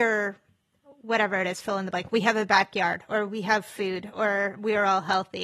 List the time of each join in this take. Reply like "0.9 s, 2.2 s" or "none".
none